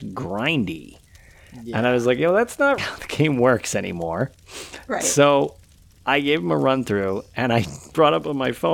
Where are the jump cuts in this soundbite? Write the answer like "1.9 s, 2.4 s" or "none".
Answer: 2.8 s